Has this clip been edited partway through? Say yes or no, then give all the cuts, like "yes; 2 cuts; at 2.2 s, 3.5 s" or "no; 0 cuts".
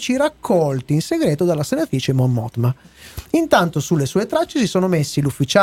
no; 0 cuts